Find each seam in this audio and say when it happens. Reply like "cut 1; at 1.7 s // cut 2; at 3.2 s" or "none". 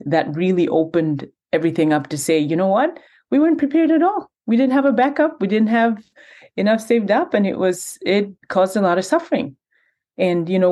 cut 1; at 4.3 s // cut 2; at 8.4 s